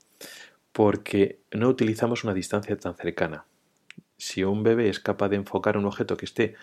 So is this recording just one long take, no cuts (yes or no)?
yes